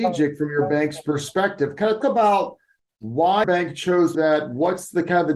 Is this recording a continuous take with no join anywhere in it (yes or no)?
no